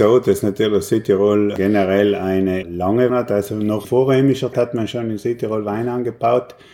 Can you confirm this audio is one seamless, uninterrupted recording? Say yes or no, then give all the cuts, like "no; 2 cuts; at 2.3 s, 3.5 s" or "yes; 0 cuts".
no; 4 cuts; at 2.6 s, 3.1 s, 3.8 s, 4.5 s